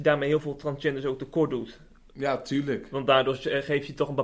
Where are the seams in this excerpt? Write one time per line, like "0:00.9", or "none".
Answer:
none